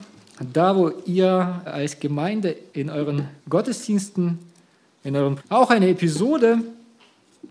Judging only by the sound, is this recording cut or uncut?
cut